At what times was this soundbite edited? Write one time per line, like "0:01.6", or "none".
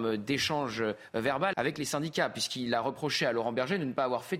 0:01.5